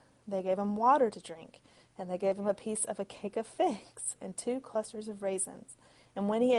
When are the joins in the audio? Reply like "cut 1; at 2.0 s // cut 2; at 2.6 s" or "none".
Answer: none

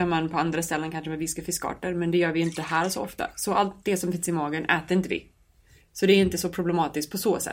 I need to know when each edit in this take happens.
none

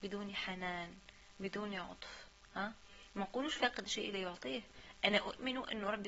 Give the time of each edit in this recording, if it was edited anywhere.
none

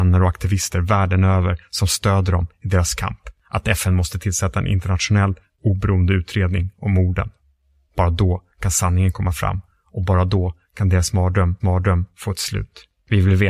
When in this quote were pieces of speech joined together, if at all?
cut 1; at 3.4 s // cut 2; at 11.6 s

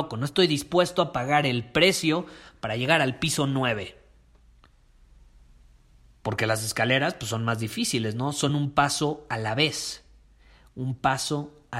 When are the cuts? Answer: none

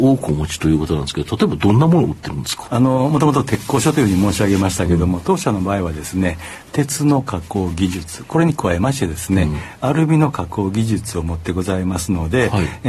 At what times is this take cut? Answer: cut 1; at 2.7 s

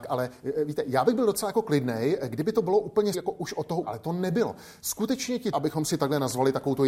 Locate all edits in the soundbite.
cut 1; at 3.1 s // cut 2; at 3.8 s // cut 3; at 5.5 s

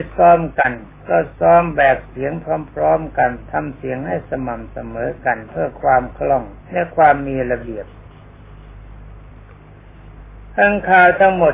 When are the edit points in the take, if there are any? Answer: cut 1; at 6.6 s

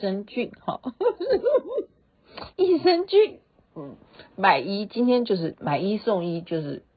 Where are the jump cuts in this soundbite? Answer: cut 1; at 2.5 s

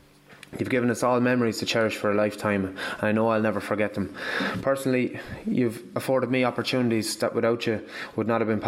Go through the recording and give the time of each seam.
none

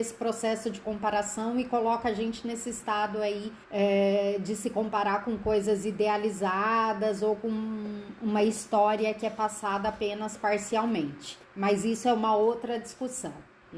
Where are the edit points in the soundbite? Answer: cut 1; at 3.6 s // cut 2; at 11.4 s

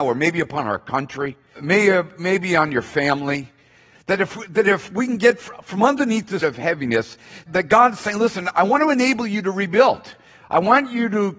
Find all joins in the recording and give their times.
cut 1; at 1.5 s // cut 2; at 6.4 s // cut 3; at 7.5 s

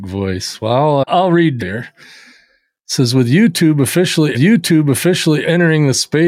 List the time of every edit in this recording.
cut 1; at 1.1 s // cut 2; at 1.6 s // cut 3; at 4.3 s

